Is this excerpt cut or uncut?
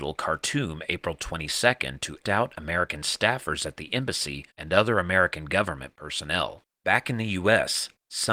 cut